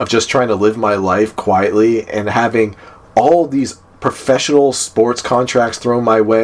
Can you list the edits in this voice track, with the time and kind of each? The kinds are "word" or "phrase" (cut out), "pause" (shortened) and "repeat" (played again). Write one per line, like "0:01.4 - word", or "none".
none